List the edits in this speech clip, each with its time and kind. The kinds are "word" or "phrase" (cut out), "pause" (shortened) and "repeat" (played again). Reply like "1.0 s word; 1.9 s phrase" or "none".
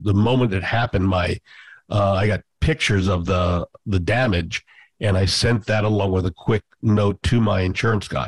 none